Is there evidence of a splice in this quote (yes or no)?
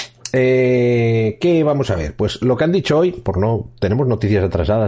no